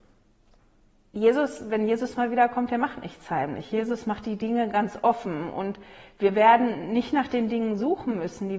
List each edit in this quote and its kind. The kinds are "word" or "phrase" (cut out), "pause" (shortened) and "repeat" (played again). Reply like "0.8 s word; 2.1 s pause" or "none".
none